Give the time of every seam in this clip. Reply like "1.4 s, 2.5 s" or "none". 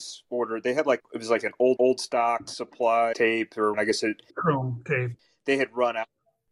1.0 s, 1.8 s, 3.1 s, 3.7 s, 4.3 s